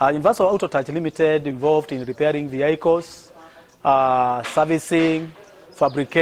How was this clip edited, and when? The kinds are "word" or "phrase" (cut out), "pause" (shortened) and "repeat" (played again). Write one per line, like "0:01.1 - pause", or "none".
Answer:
0:01.5 - word